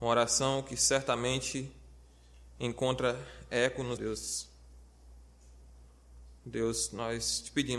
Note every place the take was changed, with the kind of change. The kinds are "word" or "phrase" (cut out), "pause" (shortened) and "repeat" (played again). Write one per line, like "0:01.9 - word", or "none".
0:04.0 - phrase